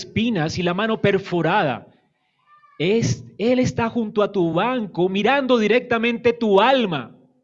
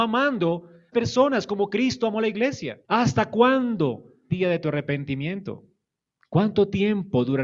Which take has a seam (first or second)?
second